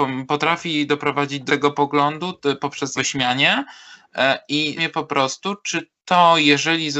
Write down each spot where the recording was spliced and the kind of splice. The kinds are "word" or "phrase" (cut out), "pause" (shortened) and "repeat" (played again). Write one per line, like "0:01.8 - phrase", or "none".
0:01.5 - word
0:03.0 - word
0:04.8 - word